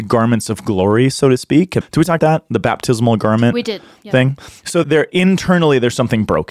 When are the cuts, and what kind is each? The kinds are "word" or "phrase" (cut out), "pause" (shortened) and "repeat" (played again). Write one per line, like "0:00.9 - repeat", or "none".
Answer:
0:01.8 - word
0:02.2 - word
0:04.8 - word